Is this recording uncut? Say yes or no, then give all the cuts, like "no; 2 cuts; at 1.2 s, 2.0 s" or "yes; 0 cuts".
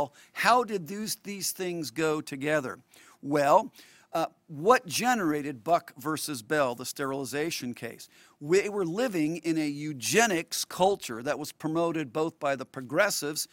yes; 0 cuts